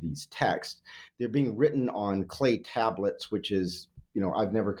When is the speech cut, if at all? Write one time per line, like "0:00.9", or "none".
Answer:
none